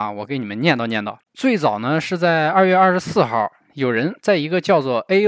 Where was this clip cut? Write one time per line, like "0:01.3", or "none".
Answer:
0:01.2

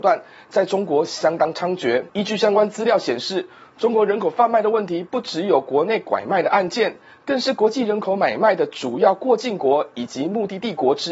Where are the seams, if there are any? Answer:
none

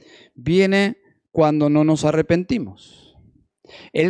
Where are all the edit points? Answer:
none

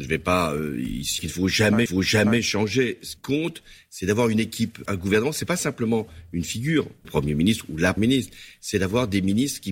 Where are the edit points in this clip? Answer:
0:01.2
0:01.9
0:03.2
0:04.9
0:07.0
0:08.0

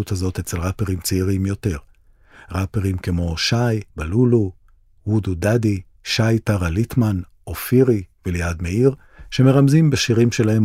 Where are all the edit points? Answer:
0:03.9
0:05.9

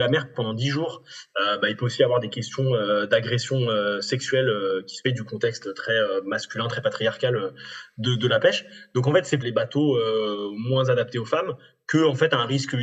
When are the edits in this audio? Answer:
0:05.0
0:09.4

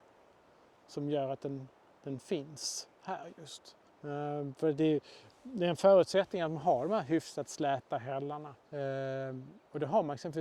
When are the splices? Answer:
0:01.9
0:02.9
0:03.9
0:08.6

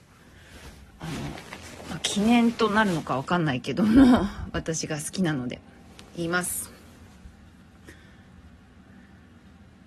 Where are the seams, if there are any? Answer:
none

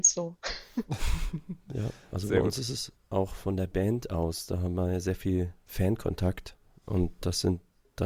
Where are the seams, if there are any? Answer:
none

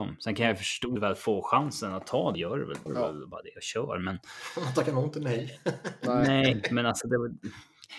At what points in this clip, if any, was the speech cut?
0:01.0
0:02.3
0:02.9

